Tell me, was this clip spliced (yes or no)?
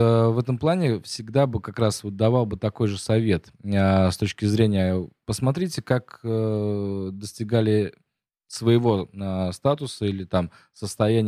no